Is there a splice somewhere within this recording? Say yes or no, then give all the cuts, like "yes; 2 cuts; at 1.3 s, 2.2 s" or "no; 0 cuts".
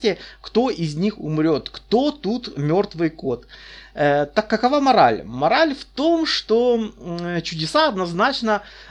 no; 0 cuts